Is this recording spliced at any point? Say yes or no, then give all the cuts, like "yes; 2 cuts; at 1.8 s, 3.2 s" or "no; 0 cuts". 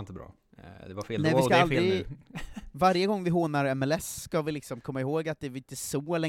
no; 0 cuts